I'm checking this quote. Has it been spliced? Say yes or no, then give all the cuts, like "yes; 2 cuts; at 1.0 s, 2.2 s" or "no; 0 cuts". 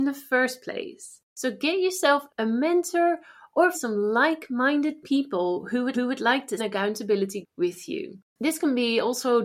yes; 7 cuts; at 1.2 s, 2.3 s, 3.7 s, 5.9 s, 6.6 s, 7.4 s, 8.3 s